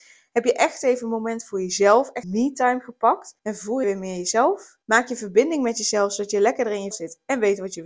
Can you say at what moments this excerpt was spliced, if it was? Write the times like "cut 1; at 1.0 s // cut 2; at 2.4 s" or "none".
cut 1; at 2.2 s // cut 2; at 3.4 s // cut 3; at 3.8 s // cut 4; at 4.8 s // cut 5; at 6.9 s